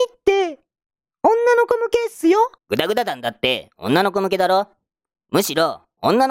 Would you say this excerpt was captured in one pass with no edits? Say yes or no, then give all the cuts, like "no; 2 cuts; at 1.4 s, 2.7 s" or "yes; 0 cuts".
no; 1 cut; at 2.6 s